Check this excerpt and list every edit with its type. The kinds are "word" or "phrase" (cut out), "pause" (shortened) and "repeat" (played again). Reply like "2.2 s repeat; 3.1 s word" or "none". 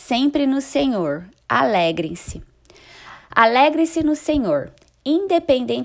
none